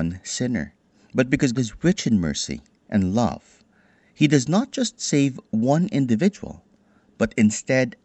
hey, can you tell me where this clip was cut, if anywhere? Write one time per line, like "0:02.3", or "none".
0:01.5